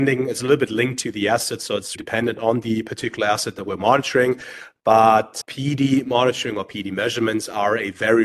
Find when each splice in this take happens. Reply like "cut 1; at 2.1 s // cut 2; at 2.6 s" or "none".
cut 1; at 2.0 s // cut 2; at 5.4 s